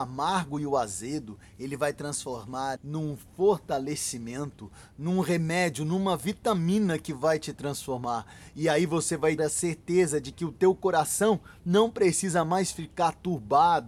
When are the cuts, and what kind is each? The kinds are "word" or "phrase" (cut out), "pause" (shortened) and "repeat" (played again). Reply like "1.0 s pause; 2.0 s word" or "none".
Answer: 2.8 s word; 9.4 s word